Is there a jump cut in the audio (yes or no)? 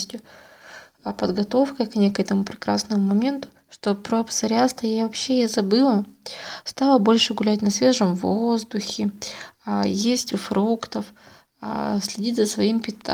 yes